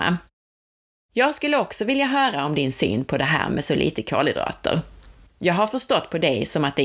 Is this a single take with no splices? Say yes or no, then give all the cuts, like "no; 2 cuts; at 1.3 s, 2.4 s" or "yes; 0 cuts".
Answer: yes; 0 cuts